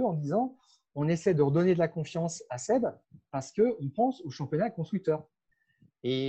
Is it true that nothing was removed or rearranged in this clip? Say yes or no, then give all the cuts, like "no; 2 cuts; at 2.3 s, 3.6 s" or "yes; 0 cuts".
yes; 0 cuts